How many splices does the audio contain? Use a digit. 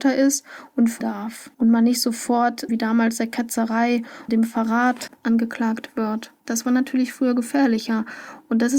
5